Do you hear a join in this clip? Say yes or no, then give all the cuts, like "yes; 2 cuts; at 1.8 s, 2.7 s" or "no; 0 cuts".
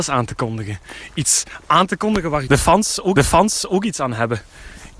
yes; 2 cuts; at 2.5 s, 3.2 s